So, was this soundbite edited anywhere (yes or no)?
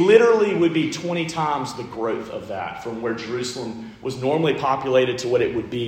no